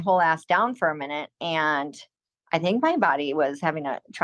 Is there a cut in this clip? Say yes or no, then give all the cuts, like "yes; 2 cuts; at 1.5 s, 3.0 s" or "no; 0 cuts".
no; 0 cuts